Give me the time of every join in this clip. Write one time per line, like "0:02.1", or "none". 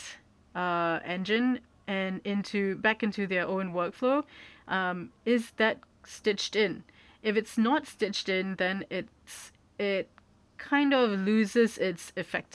none